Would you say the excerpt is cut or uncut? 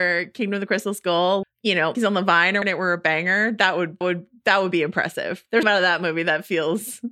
cut